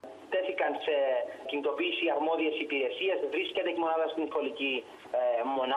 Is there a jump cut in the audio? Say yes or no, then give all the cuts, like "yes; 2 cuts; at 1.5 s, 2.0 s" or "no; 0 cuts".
yes; 3 cuts; at 1.5 s, 3.8 s, 4.3 s